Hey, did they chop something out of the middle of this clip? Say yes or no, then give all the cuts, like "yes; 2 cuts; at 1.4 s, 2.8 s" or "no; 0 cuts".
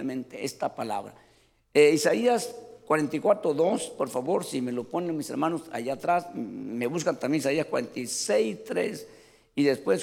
no; 0 cuts